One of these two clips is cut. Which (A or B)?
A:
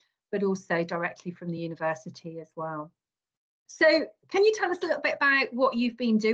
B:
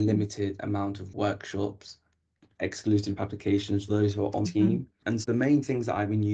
B